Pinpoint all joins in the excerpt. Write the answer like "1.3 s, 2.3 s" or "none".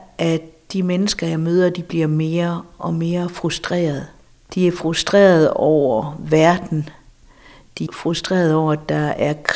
7.9 s